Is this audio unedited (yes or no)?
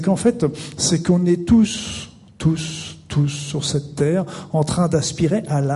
yes